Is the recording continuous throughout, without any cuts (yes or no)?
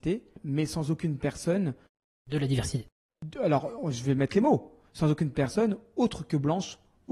yes